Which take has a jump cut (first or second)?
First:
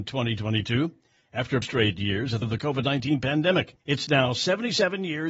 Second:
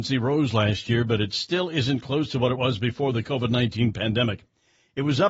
first